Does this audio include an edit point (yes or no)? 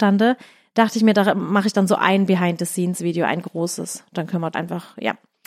yes